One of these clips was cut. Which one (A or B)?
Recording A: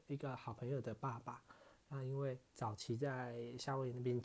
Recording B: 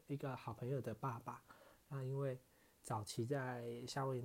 A